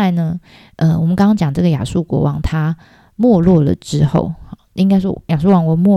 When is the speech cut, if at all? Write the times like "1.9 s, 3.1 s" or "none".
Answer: none